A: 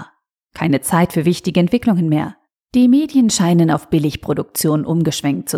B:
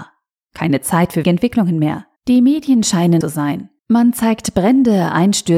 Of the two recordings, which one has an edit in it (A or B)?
B